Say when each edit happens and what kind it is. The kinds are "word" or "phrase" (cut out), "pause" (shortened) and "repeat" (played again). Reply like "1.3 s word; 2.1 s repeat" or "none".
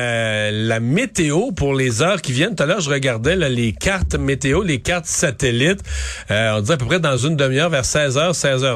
none